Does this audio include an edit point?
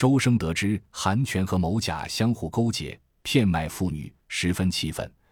no; 0 cuts

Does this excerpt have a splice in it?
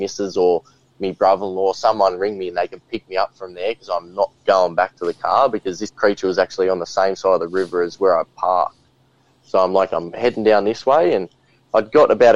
no; 0 cuts

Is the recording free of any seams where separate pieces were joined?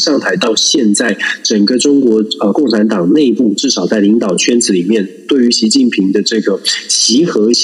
yes; 0 cuts

